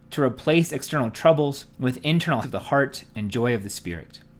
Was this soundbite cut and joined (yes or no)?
yes